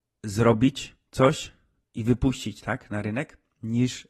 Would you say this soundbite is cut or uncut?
cut